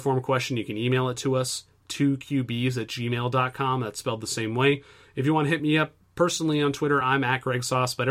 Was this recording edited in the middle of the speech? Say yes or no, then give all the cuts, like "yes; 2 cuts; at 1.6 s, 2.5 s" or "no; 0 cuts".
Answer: no; 0 cuts